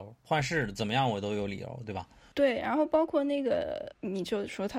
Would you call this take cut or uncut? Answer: uncut